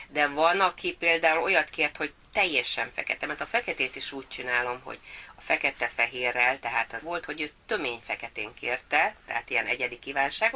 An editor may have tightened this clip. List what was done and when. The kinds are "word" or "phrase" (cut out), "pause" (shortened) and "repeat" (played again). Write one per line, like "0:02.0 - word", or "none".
0:07.0 - phrase